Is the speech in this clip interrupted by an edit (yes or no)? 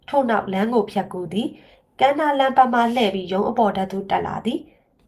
no